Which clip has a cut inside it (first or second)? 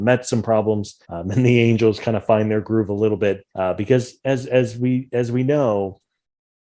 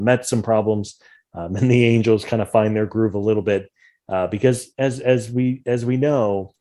first